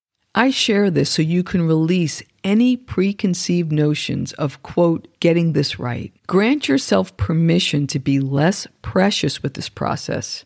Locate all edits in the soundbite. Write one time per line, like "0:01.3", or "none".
0:05.1
0:06.2